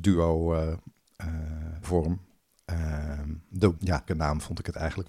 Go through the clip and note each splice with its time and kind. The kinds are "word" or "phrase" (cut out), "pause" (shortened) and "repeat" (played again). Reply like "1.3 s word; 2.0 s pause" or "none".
1.8 s word; 3.8 s word; 4.1 s word